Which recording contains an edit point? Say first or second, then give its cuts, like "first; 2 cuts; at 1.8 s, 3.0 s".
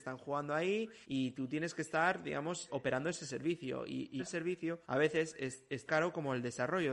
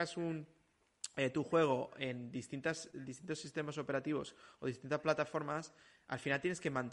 first; 5 cuts; at 1.0 s, 2.7 s, 4.2 s, 4.8 s, 5.9 s